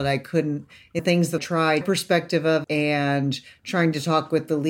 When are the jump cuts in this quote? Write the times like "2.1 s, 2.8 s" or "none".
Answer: 1.0 s, 1.4 s, 1.8 s, 2.6 s